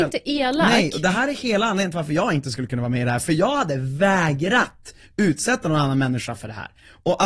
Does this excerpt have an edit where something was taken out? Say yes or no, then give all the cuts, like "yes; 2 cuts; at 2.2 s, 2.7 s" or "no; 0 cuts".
no; 0 cuts